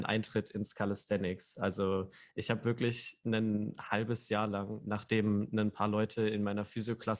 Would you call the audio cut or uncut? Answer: uncut